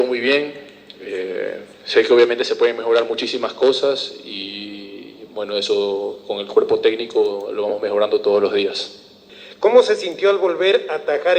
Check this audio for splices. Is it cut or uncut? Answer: uncut